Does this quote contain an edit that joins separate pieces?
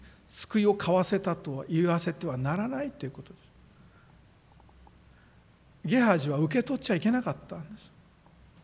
no; 0 cuts

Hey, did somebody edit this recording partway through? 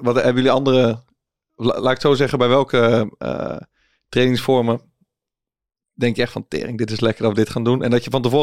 no; 0 cuts

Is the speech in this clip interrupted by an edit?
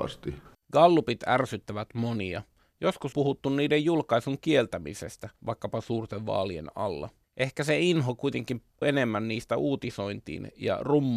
yes; 4 cuts; at 3.1 s, 5.4 s, 7.2 s, 8.8 s

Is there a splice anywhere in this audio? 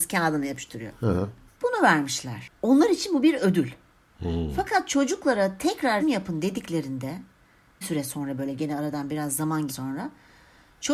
yes; 3 cuts; at 6.0 s, 7.8 s, 9.7 s

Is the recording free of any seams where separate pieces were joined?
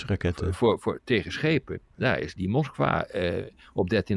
no; 1 cut; at 2.4 s

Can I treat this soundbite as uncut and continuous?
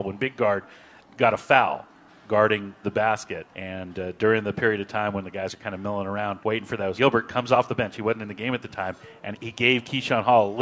no; 5 cuts; at 2.8 s, 3.5 s, 6.4 s, 7.0 s, 9.3 s

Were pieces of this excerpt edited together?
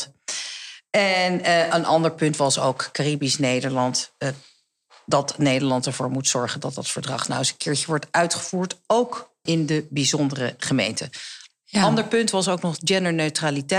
yes; 1 cut; at 9.5 s

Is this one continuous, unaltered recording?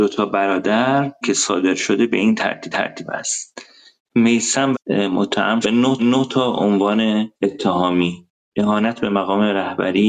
no; 6 cuts; at 1.2 s, 2.7 s, 4.7 s, 5.6 s, 6.0 s, 7.4 s

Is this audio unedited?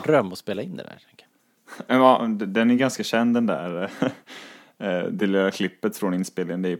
yes; 0 cuts

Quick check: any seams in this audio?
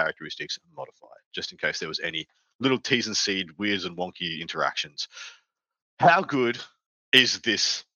no; 0 cuts

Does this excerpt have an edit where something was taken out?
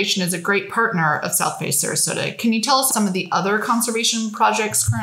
yes; 1 cut; at 2.9 s

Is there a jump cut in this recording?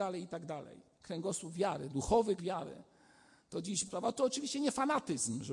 yes; 3 cuts; at 0.9 s, 2.4 s, 3.9 s

